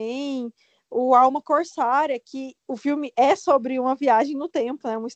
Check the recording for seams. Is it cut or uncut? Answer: uncut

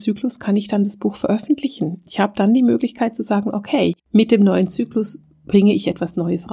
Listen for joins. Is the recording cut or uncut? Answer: cut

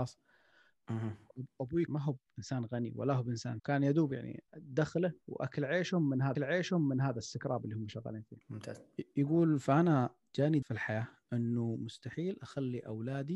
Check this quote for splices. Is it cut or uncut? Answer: cut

